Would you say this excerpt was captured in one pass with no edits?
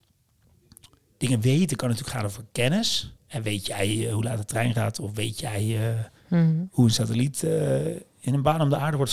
no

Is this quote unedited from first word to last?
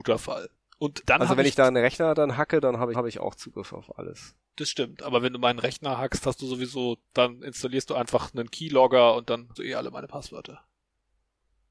no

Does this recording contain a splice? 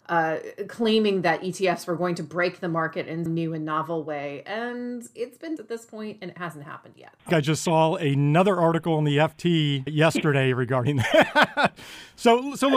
yes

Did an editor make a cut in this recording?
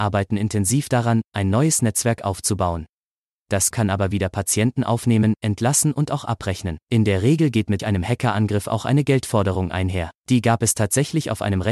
yes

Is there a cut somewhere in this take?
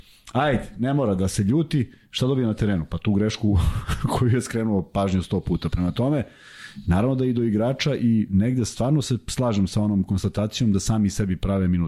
no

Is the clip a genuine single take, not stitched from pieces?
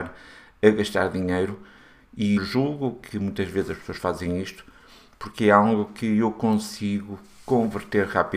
no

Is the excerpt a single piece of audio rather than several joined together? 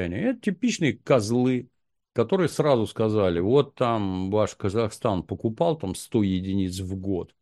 yes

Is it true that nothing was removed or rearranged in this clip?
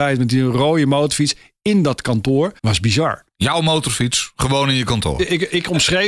no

